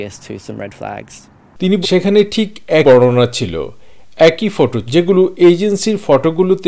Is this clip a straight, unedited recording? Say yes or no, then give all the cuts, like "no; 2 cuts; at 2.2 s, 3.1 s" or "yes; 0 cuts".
no; 3 cuts; at 1.8 s, 2.8 s, 4.9 s